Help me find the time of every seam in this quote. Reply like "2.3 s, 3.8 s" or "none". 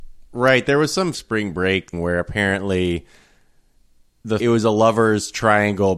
1.1 s, 1.9 s, 4.4 s